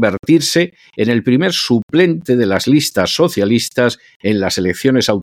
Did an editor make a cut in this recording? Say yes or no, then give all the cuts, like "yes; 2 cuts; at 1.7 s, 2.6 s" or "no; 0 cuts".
no; 0 cuts